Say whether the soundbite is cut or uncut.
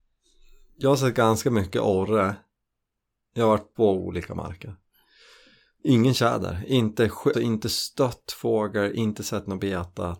cut